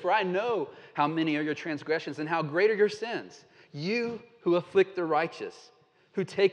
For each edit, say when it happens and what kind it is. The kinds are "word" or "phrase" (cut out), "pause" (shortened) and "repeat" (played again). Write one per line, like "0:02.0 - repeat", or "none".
none